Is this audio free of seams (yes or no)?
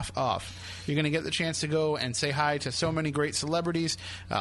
yes